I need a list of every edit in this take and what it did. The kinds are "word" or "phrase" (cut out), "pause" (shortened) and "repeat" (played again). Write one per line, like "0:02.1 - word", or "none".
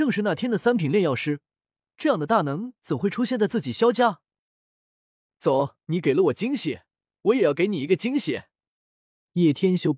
0:05.8 - pause